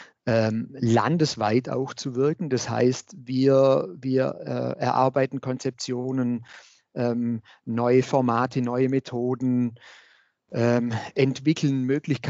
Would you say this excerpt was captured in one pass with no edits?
yes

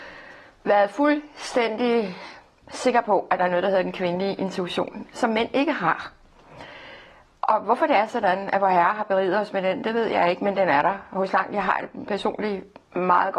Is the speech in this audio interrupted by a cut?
no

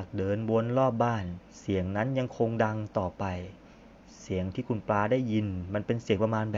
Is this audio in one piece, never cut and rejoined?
no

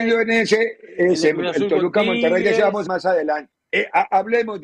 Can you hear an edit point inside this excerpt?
yes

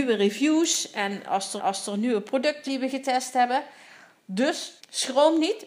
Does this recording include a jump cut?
yes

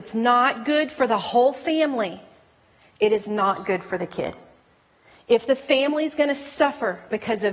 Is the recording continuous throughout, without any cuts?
yes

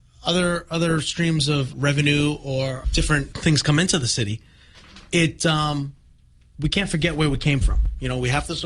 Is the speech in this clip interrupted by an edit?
yes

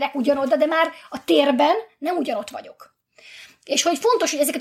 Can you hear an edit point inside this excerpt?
no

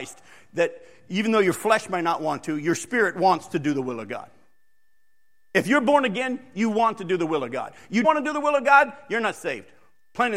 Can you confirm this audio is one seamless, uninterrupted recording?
no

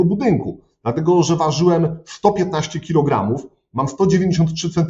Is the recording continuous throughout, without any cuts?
yes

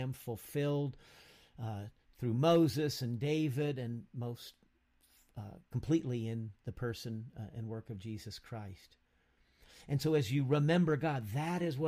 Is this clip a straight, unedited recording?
yes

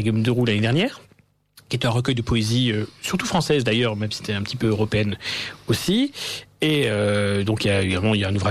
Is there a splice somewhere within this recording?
no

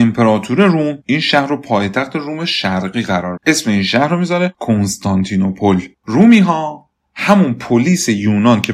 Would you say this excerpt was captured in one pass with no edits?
no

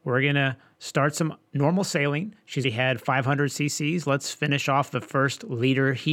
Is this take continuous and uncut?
no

